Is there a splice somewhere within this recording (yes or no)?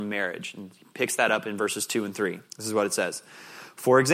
yes